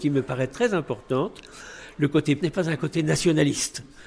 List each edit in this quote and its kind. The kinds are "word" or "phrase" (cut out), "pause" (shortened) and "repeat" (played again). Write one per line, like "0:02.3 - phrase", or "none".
0:02.4 - word

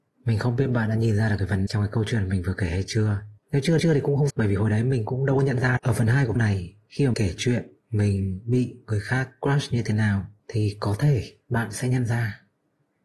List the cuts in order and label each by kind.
0:01.7 - word
0:03.4 - pause
0:03.8 - repeat
0:04.3 - phrase
0:05.8 - word
0:06.4 - word
0:07.1 - word
0:10.4 - pause
0:11.4 - pause

